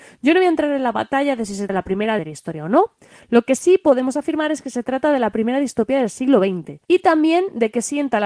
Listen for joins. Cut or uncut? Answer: cut